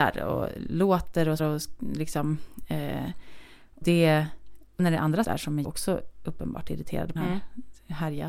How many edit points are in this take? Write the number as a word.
six